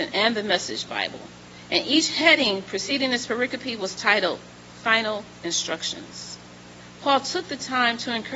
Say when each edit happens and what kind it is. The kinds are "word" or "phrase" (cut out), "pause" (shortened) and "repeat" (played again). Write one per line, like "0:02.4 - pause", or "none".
none